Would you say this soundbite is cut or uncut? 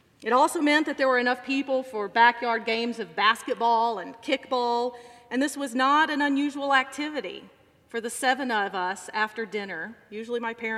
uncut